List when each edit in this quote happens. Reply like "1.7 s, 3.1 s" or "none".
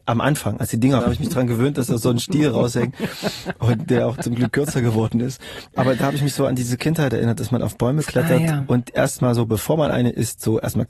1.0 s